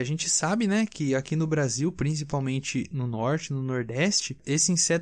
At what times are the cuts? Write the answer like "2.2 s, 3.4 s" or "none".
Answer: none